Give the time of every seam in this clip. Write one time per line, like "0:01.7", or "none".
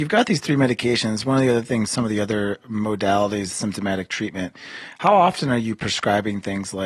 0:01.9
0:03.5